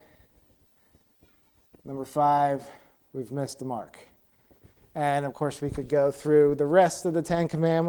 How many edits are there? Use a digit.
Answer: 0